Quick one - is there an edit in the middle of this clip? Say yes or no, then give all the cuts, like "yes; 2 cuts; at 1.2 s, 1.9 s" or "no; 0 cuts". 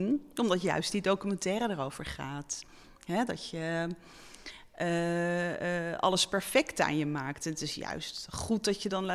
no; 0 cuts